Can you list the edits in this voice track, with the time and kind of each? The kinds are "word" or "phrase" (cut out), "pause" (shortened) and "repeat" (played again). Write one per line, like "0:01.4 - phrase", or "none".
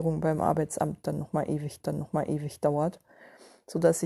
0:01.8 - repeat

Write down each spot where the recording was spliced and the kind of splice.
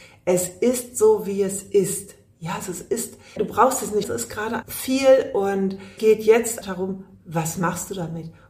0:03.4 - word
0:04.0 - word
0:04.6 - word
0:06.0 - word
0:06.6 - word

